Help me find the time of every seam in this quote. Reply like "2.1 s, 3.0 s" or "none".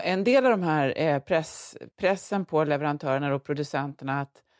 1.9 s